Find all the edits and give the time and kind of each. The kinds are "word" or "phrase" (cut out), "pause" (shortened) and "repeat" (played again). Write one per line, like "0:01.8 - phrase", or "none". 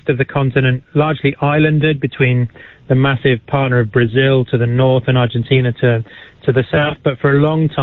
none